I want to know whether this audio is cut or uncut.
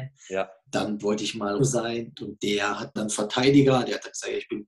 cut